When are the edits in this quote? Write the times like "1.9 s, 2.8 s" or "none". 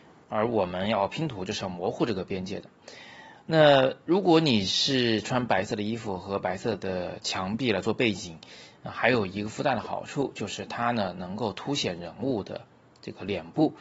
none